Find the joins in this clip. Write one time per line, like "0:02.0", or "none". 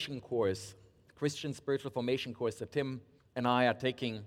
0:03.2